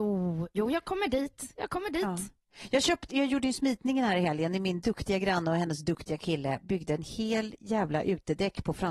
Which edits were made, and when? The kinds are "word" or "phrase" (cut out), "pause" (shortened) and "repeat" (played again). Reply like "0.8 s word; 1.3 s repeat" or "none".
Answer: 3.1 s word